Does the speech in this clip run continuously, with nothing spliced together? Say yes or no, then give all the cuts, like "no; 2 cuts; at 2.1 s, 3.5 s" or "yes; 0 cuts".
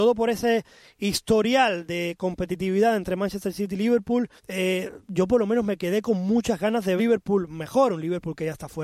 no; 2 cuts; at 4.4 s, 7.0 s